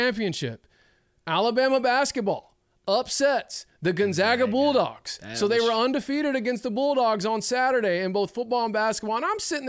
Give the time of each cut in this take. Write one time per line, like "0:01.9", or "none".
none